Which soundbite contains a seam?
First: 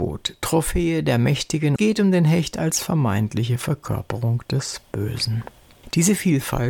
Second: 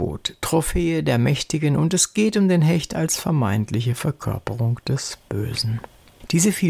first; 1 cut; at 1.8 s

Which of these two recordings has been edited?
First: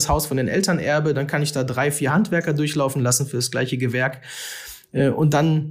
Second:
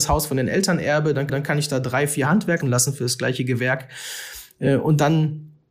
second; 2 cuts; at 1.3 s, 2.6 s

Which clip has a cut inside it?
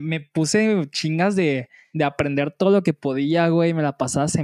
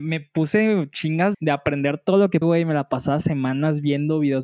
second; 2 cuts; at 1.3 s, 2.4 s

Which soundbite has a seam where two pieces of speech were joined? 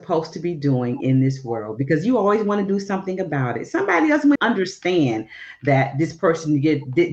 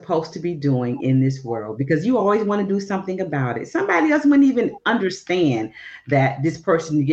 first; 1 cut; at 4.4 s

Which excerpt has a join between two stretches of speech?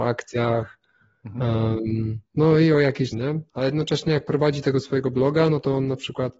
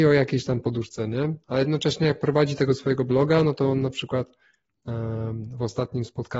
first; 2 cuts; at 2.3 s, 3.1 s

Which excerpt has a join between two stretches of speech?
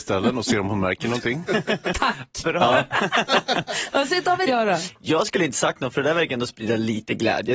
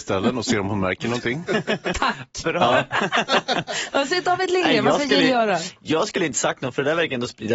first; 1 cut; at 4.5 s

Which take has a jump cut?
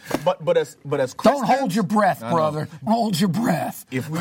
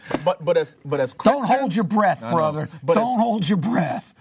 first; 1 cut; at 2.9 s

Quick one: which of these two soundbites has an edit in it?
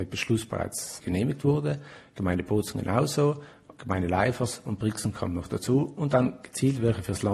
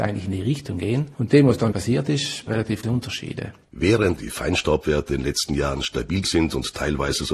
second; 6 cuts; at 1.7 s, 2.5 s, 2.8 s, 4.2 s, 5.1 s, 6.2 s

